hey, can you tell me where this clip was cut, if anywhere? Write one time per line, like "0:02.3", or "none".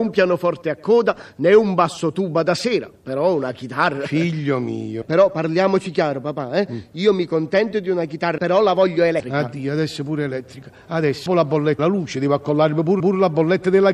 0:08.4
0:11.3
0:11.8
0:13.0